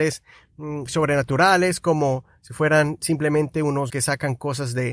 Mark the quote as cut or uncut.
cut